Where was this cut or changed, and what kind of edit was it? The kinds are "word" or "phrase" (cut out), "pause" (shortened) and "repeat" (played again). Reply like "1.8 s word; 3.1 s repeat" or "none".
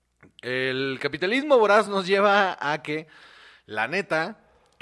none